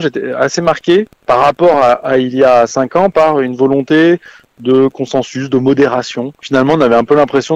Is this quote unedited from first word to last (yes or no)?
yes